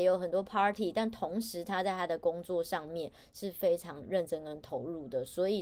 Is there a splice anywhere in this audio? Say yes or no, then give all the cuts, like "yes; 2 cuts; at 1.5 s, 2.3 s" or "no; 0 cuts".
no; 0 cuts